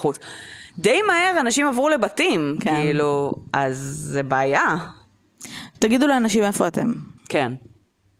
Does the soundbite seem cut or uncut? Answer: cut